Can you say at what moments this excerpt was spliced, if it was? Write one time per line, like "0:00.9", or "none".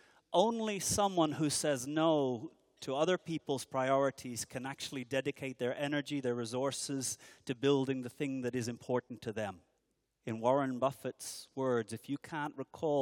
0:09.8